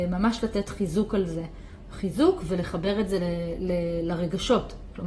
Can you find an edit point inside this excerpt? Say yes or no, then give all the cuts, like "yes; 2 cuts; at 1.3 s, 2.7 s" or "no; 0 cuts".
no; 0 cuts